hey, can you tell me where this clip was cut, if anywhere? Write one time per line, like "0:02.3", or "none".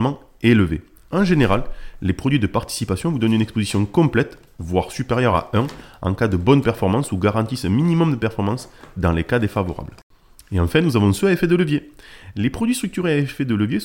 none

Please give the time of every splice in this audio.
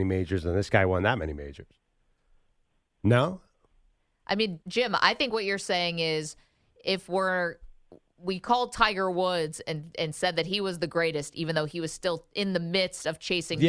0:04.6

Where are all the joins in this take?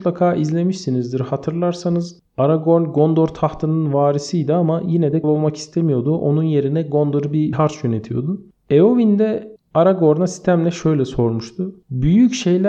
0:05.2
0:07.5

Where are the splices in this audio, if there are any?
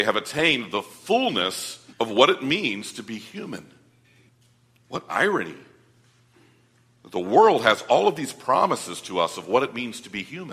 0:01.9
0:04.3

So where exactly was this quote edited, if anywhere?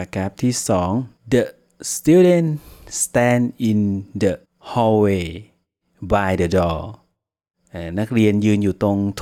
0:01.2
0:04.4

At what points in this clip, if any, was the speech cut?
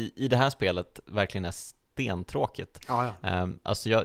none

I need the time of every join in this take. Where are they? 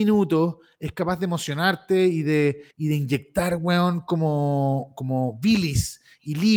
0:02.7

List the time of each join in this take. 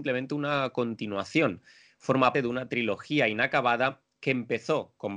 0:02.3

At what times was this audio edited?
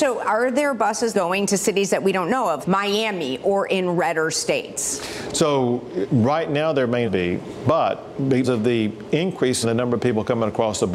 0:01.1
0:02.6
0:06.1
0:07.0
0:08.4
0:09.6

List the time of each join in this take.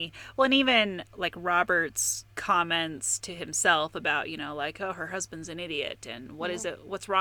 0:02.3

